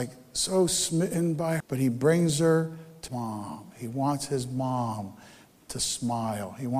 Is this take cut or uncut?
cut